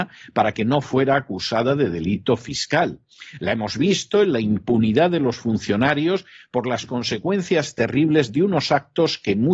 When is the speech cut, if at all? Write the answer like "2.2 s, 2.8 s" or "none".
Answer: none